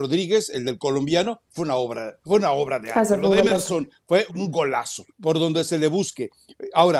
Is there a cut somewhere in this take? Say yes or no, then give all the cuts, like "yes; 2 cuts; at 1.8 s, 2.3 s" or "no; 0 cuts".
yes; 2 cuts; at 4.3 s, 5.1 s